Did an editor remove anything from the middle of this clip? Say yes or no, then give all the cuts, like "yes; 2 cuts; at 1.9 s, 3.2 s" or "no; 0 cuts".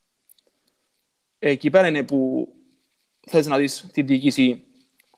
no; 0 cuts